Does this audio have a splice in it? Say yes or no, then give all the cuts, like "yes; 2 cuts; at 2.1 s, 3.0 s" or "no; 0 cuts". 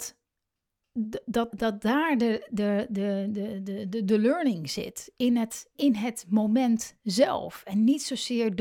yes; 2 cuts; at 1.5 s, 5.7 s